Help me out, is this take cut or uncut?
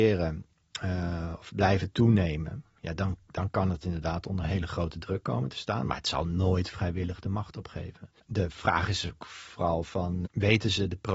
cut